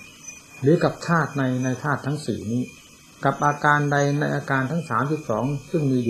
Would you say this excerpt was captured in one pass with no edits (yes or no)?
yes